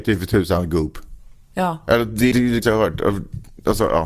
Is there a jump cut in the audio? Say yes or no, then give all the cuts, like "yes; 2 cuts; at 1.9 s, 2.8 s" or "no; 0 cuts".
yes; 3 cuts; at 1.4 s, 2.3 s, 2.6 s